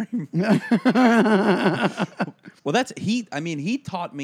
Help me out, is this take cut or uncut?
cut